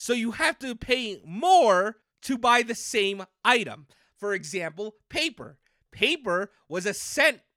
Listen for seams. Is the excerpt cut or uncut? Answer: cut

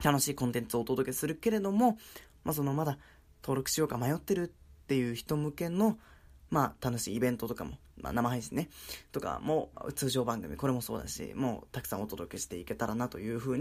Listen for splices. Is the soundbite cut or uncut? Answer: uncut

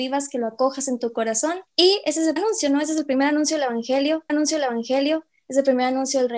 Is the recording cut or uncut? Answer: cut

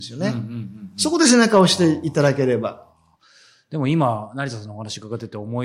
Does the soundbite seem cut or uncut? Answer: uncut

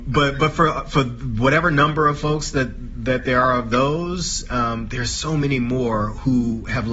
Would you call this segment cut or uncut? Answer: uncut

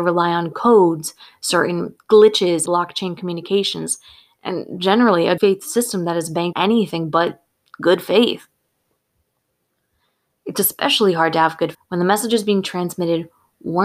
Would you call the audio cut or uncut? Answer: cut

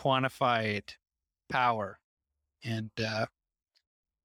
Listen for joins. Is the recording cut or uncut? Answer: uncut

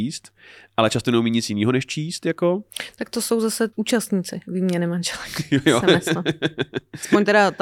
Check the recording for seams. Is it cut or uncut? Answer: cut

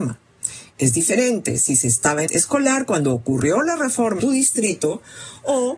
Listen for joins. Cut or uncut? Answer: cut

